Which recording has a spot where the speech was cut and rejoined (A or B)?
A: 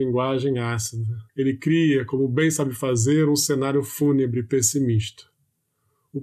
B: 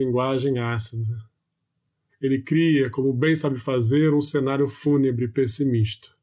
A